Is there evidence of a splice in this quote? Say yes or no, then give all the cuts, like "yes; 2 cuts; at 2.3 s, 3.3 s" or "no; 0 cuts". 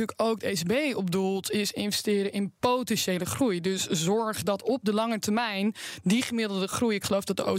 no; 0 cuts